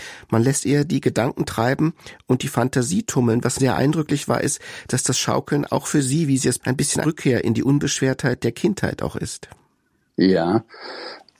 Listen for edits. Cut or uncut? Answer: cut